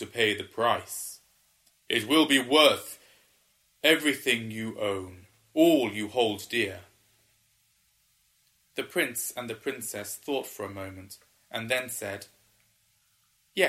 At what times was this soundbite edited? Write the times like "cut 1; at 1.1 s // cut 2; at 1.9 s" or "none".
none